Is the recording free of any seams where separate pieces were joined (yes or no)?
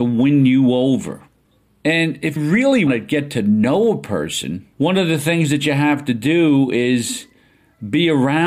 no